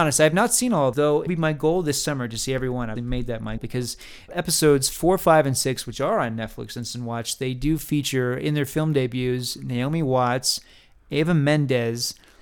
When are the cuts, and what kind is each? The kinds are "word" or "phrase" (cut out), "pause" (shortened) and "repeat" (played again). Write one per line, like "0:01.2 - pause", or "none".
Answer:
0:00.9 - word
0:01.3 - word
0:03.0 - word
0:03.6 - word
0:04.3 - word